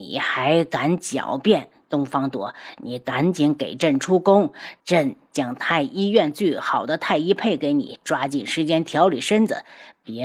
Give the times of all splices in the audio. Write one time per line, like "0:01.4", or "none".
0:04.8